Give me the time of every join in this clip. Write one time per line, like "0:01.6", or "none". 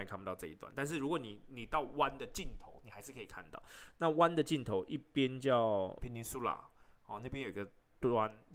0:06.0